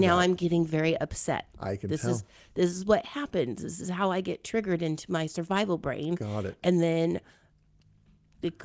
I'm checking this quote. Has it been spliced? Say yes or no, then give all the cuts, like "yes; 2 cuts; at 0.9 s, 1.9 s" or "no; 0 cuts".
no; 0 cuts